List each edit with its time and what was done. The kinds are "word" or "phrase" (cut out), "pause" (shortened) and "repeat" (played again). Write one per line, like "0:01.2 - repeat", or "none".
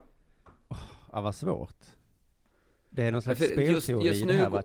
none

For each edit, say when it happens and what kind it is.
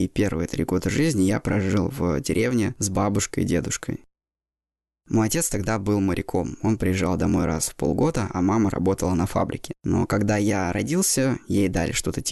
0:09.8 - pause

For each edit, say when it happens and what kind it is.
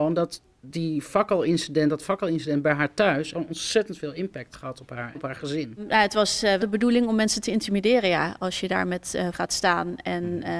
0:03.3 - word
0:04.5 - word
0:05.1 - word
0:06.6 - word
0:09.3 - word

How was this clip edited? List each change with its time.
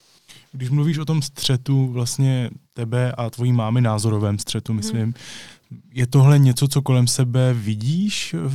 none

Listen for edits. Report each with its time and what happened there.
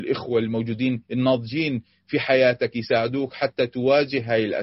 none

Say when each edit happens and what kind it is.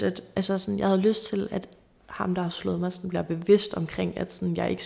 none

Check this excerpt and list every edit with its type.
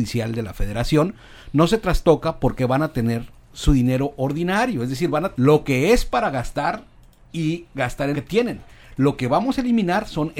0:05.3 - word
0:08.1 - word

